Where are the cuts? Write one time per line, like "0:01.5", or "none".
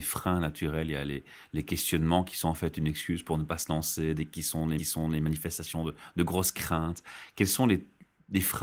0:04.8